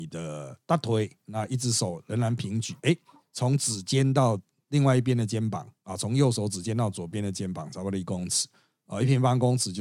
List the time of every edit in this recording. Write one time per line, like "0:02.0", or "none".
none